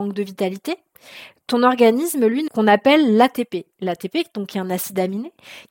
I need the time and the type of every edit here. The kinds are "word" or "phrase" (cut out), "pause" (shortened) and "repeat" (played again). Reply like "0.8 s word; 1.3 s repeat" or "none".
2.5 s phrase